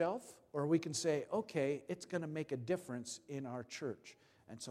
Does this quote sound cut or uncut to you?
uncut